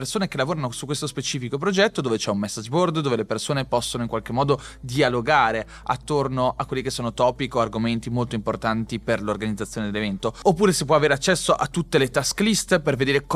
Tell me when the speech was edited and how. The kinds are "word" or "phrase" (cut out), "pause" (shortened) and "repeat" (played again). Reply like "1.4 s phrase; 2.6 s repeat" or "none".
none